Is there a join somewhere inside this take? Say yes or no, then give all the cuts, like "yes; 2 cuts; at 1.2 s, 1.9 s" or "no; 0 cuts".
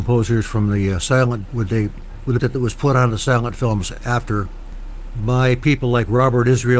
yes; 2 cuts; at 1.4 s, 2.4 s